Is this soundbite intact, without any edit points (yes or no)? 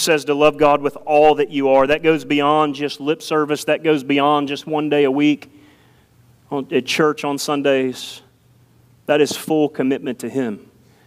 yes